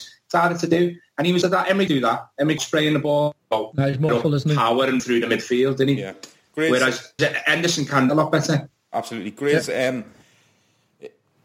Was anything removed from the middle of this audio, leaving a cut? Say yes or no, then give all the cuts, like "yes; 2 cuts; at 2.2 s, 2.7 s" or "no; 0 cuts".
yes; 8 cuts; at 1.4 s, 1.9 s, 2.6 s, 3.4 s, 4.1 s, 5.0 s, 7.2 s, 8.1 s